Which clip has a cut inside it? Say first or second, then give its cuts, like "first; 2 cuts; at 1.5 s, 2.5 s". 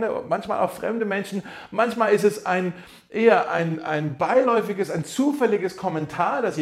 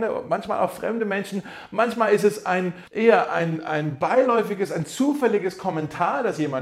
second; 1 cut; at 2.9 s